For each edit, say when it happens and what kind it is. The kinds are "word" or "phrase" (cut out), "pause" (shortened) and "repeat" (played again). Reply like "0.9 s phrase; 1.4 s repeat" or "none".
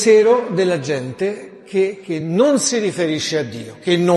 none